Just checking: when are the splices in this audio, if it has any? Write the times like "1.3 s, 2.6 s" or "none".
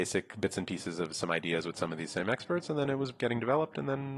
none